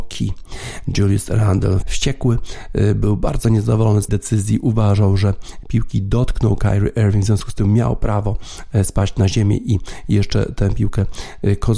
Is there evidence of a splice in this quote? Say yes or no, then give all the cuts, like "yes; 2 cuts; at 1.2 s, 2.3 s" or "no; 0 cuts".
yes; 2 cuts; at 1.8 s, 4.1 s